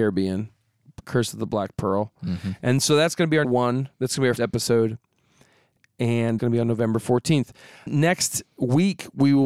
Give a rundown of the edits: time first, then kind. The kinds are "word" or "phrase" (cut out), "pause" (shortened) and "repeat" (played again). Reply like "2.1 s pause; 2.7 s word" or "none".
3.4 s word; 4.4 s word; 6.4 s word; 7.9 s word